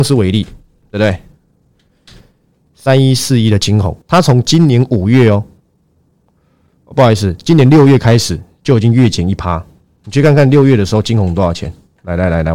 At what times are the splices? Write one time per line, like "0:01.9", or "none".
0:04.0